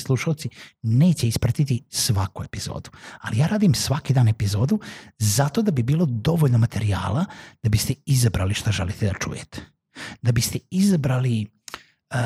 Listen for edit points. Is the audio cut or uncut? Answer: uncut